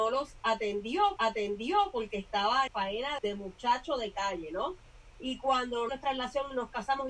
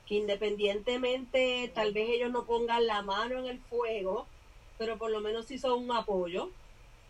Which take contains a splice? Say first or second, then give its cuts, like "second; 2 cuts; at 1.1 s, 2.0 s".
first; 5 cuts; at 1.2 s, 2.7 s, 3.2 s, 5.1 s, 5.9 s